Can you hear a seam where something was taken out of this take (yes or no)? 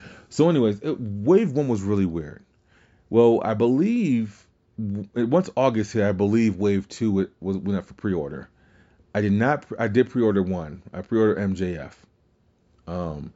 no